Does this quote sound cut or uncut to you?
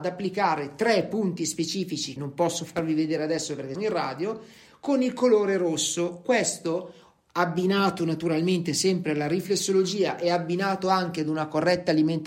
cut